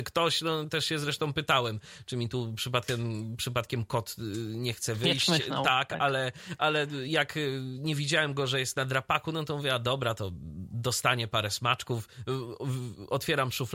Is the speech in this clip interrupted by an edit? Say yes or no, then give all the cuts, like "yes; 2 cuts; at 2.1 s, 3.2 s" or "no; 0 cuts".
no; 0 cuts